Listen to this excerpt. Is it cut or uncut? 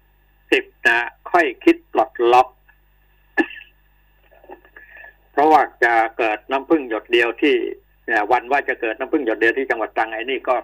uncut